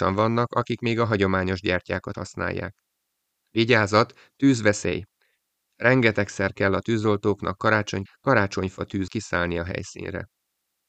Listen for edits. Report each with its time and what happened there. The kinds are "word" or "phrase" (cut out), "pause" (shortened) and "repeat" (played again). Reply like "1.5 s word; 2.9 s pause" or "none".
2.1 s word; 8.1 s word; 9.1 s word